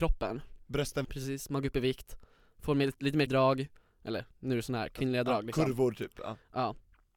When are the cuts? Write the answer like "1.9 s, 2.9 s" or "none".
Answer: 1.0 s, 3.3 s